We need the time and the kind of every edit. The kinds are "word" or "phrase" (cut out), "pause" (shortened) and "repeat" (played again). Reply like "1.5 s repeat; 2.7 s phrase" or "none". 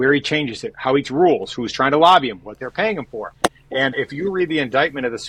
1.0 s word; 3.9 s word